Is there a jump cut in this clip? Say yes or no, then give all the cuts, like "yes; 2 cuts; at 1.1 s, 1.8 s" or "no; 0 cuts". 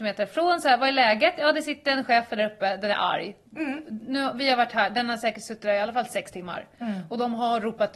no; 0 cuts